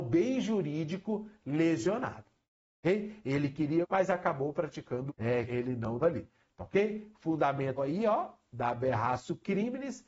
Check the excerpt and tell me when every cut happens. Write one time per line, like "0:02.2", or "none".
0:03.8
0:05.1
0:05.5
0:06.0
0:07.8